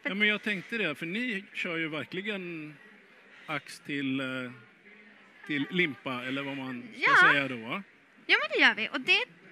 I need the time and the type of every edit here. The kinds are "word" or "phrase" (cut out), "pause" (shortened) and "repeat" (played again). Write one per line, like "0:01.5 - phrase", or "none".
none